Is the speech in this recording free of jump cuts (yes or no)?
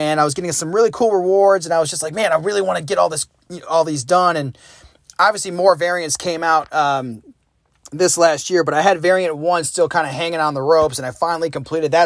yes